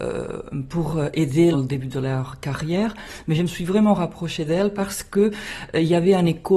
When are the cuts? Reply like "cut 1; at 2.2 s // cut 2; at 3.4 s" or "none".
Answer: cut 1; at 1.5 s